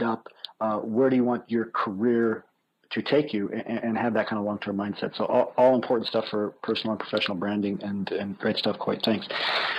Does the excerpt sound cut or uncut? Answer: cut